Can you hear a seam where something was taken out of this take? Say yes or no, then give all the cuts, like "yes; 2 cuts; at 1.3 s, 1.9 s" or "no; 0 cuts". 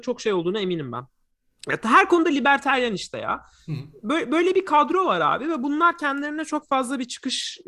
no; 0 cuts